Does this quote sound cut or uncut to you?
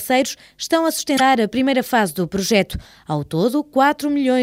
uncut